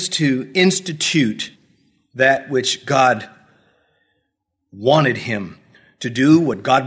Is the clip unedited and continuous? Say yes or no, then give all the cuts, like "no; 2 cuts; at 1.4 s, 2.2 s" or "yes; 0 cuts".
yes; 0 cuts